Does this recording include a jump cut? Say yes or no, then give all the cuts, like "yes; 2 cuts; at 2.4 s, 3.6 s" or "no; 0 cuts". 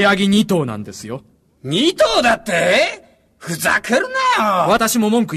no; 0 cuts